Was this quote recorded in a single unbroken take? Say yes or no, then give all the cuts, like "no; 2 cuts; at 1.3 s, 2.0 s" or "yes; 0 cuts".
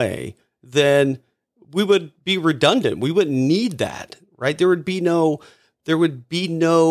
yes; 0 cuts